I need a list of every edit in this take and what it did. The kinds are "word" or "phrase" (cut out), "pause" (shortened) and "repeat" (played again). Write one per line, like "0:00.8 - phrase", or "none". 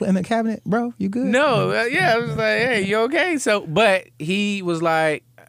none